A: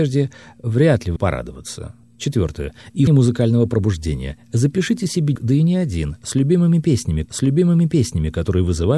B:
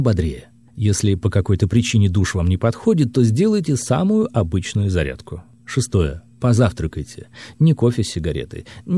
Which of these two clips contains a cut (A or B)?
A